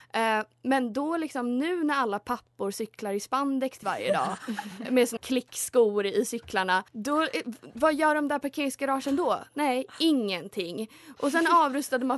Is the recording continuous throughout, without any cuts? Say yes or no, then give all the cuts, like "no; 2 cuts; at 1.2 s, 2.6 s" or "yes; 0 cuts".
no; 3 cuts; at 3.8 s, 5.2 s, 6.9 s